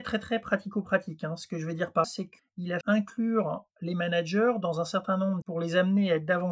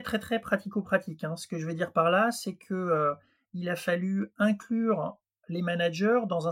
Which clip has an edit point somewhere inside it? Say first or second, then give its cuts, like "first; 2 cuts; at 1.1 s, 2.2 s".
first; 5 cuts; at 2.0 s, 2.4 s, 2.8 s, 3.7 s, 5.4 s